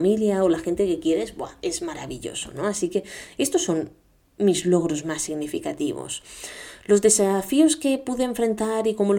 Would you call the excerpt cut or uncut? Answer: uncut